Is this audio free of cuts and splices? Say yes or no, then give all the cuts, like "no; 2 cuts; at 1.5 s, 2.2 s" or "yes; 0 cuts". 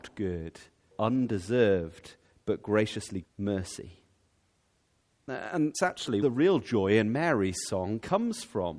no; 4 cuts; at 0.9 s, 3.2 s, 5.7 s, 6.2 s